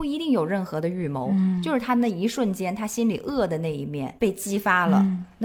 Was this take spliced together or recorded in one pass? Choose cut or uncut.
cut